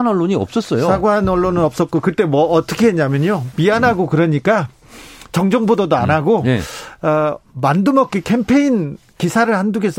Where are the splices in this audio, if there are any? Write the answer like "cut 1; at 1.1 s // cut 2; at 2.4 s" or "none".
none